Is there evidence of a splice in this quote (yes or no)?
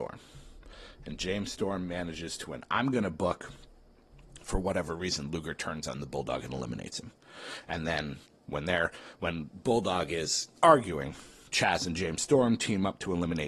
yes